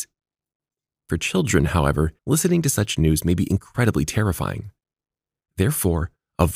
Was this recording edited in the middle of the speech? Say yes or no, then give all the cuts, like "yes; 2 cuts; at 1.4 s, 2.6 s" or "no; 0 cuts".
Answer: yes; 1 cut; at 2.2 s